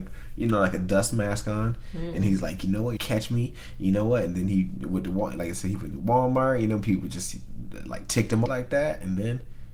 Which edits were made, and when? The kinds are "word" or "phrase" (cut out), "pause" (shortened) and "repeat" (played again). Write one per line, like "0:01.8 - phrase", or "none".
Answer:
0:03.0 - phrase
0:08.5 - phrase